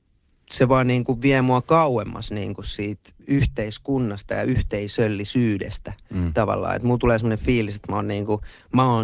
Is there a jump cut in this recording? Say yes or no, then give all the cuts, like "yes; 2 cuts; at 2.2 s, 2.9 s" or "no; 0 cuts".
yes; 1 cut; at 3.2 s